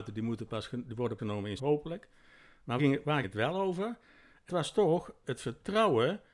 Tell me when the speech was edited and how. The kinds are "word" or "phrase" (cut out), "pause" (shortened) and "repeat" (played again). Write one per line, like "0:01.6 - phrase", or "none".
0:01.2 - word
0:01.6 - word
0:02.8 - word
0:03.2 - word
0:04.5 - word
0:05.2 - word